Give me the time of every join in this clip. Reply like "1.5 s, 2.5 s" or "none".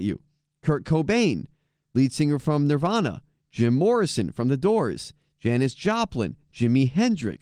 none

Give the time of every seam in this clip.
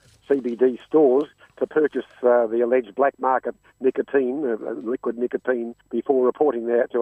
5.8 s

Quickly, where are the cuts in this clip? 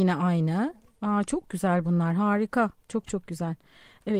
none

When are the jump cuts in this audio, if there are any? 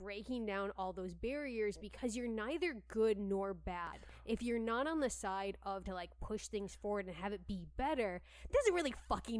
5.8 s, 8.5 s

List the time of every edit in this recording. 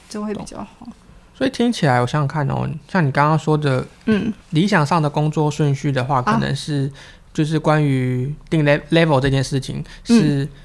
4.4 s

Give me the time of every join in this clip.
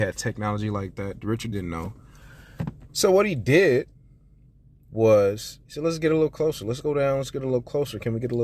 1.5 s, 5.6 s, 6.8 s

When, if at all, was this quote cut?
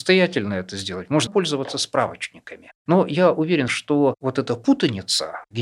1.3 s, 3.7 s

